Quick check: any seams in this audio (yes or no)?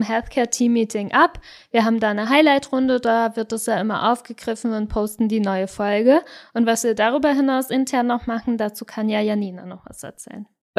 no